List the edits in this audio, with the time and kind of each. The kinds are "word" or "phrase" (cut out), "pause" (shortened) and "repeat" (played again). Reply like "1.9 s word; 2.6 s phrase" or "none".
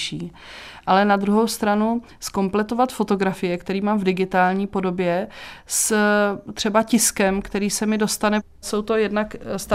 none